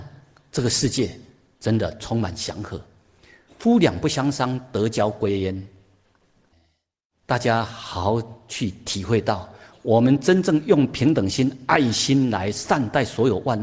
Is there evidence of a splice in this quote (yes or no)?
no